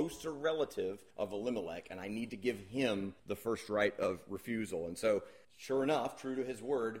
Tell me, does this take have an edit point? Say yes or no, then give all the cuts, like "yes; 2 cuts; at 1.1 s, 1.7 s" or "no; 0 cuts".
yes; 3 cuts; at 1.1 s, 3.2 s, 5.4 s